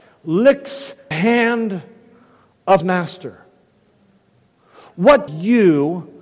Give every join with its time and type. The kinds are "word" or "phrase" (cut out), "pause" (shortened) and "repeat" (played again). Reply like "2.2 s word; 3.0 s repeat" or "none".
1.1 s word; 2.8 s word; 5.3 s word